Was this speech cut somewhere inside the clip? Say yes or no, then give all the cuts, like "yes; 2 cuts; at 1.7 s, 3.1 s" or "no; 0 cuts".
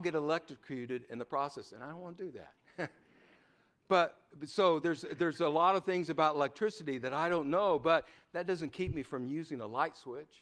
no; 0 cuts